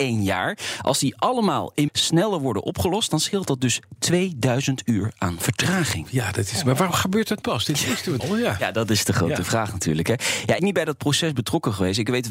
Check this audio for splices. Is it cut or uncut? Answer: cut